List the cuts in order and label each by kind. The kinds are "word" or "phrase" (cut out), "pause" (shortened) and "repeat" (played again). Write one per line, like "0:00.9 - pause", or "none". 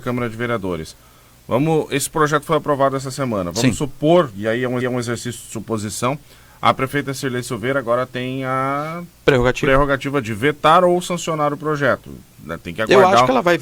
0:04.8 - repeat